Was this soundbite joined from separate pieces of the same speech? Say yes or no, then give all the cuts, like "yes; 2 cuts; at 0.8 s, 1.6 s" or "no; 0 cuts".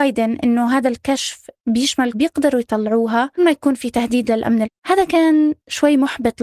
yes; 3 cuts; at 2.1 s, 3.4 s, 4.6 s